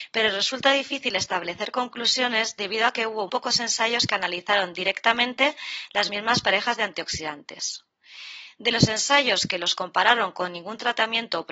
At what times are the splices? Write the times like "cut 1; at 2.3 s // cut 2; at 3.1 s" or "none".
cut 1; at 3.3 s